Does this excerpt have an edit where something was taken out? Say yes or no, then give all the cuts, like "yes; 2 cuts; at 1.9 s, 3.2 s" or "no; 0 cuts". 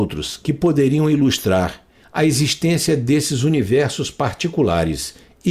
no; 0 cuts